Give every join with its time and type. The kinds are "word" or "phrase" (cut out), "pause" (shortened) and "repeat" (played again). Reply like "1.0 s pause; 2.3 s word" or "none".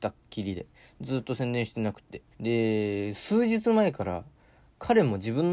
2.3 s pause